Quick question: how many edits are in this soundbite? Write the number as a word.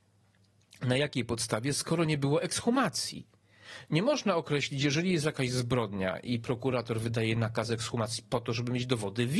zero